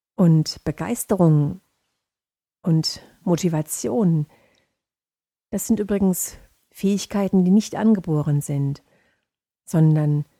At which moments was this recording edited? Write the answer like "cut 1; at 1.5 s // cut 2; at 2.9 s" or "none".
none